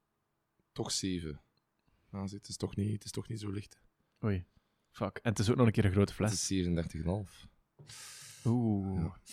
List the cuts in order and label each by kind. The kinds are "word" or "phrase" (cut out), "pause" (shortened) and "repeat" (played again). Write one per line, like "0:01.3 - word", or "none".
none